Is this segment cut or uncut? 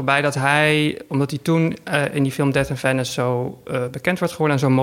uncut